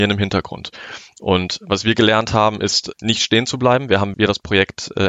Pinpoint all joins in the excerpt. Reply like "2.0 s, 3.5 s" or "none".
2.9 s, 4.1 s